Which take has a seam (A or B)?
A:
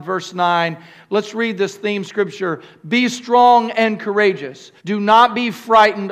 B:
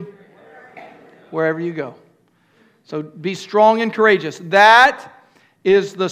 A